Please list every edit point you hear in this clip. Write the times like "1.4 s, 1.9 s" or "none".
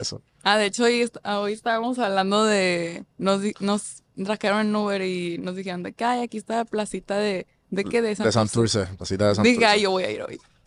3.1 s, 4.1 s